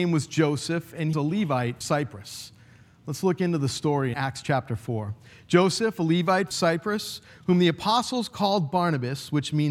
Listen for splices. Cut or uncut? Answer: cut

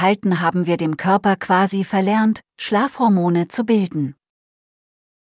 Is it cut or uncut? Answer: uncut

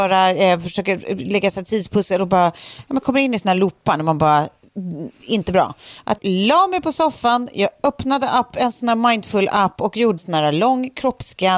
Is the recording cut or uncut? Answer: cut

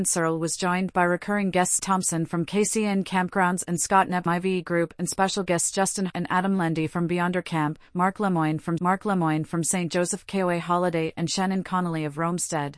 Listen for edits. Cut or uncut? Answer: cut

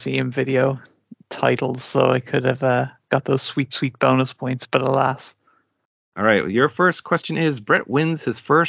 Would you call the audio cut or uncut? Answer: uncut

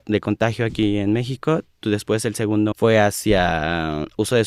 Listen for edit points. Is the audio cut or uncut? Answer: cut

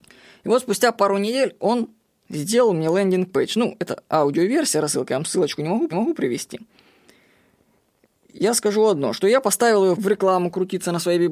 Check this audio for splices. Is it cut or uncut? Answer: cut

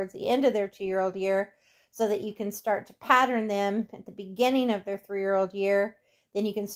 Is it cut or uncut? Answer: uncut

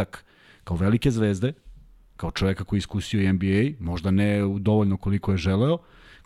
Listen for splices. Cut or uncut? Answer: uncut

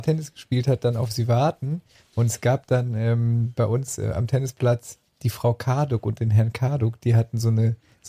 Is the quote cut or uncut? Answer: uncut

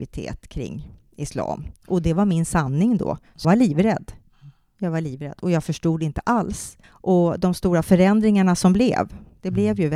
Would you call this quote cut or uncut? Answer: cut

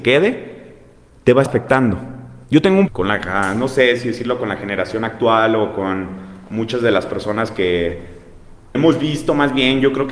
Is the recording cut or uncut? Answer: cut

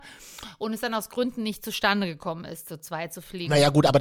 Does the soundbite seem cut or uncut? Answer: uncut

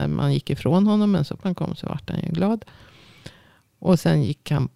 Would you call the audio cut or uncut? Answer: cut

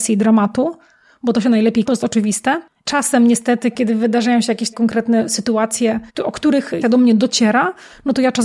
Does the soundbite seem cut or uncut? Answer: cut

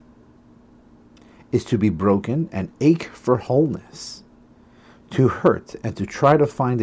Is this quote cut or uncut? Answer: uncut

